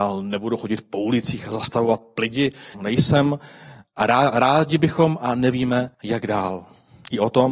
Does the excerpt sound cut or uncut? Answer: cut